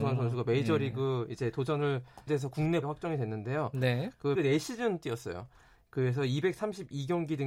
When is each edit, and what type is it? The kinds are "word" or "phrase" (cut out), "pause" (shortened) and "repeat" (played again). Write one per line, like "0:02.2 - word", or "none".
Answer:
0:02.3 - word
0:02.8 - word
0:04.4 - word